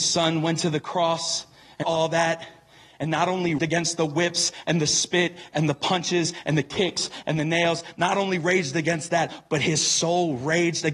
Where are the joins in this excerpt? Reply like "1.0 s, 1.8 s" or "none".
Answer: 1.8 s, 3.6 s